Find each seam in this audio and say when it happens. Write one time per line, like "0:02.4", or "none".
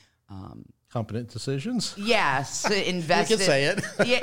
none